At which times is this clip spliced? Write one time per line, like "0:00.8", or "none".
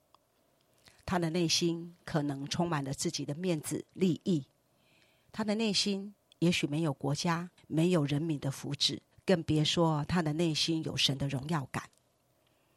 0:03.9
0:07.6
0:09.1